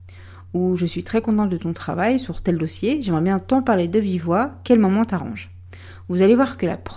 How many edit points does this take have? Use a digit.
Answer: 0